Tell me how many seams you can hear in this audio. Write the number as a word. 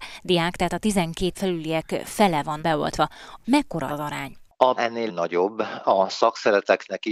six